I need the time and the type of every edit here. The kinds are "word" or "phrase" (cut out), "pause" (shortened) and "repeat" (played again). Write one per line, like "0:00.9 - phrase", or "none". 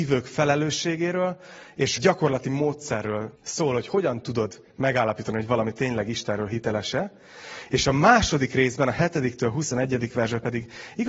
0:02.0 - phrase
0:03.3 - pause